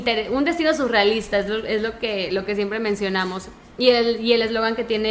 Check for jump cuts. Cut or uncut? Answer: uncut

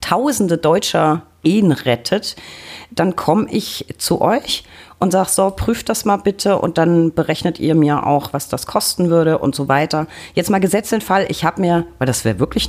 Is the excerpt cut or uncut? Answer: uncut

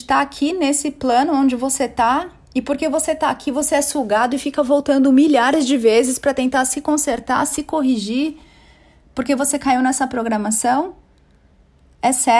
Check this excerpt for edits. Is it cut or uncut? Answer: uncut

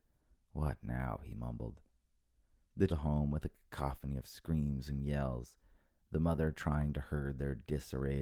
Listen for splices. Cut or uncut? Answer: cut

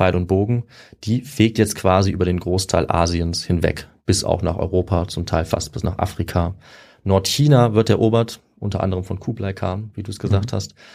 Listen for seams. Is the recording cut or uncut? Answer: uncut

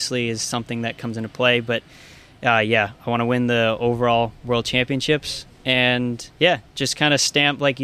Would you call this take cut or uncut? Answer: cut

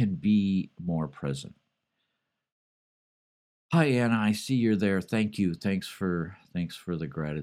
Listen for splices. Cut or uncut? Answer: uncut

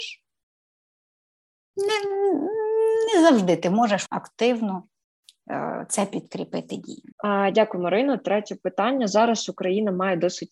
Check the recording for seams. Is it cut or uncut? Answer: cut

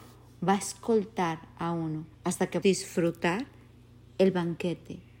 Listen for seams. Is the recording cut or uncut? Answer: cut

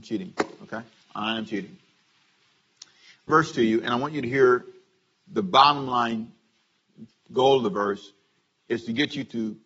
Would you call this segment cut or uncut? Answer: cut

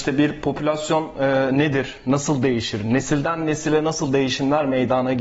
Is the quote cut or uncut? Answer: uncut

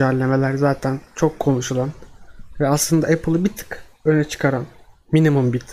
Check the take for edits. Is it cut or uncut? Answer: uncut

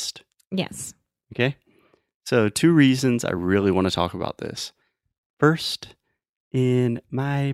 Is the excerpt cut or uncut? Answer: uncut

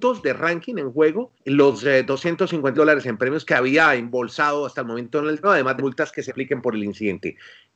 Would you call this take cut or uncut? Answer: cut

